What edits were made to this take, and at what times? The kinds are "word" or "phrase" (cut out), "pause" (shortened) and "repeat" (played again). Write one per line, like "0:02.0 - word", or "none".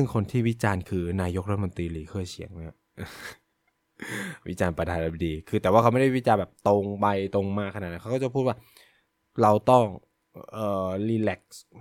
0:09.1 - pause